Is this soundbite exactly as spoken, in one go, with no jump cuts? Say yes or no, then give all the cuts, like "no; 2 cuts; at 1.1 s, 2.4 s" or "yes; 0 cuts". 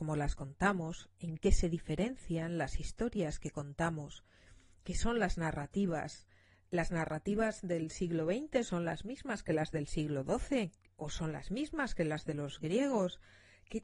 yes; 0 cuts